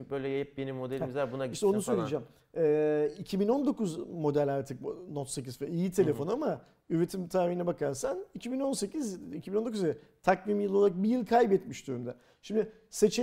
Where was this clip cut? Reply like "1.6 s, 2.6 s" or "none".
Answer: none